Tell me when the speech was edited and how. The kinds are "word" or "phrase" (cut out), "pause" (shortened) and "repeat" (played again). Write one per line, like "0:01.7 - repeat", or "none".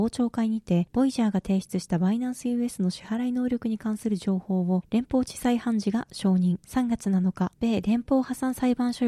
none

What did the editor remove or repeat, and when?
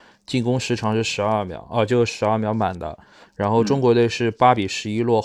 none

